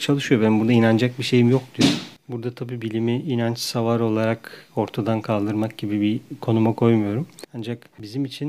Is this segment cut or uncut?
uncut